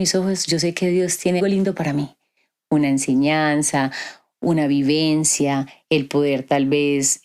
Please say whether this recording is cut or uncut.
cut